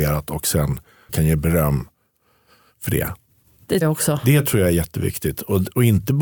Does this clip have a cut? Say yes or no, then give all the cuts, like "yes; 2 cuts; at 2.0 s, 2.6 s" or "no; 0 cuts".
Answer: yes; 2 cuts; at 1.1 s, 3.8 s